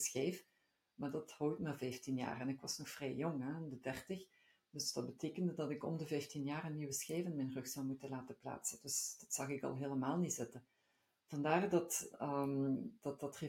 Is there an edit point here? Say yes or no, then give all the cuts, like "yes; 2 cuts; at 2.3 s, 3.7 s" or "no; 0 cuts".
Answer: no; 0 cuts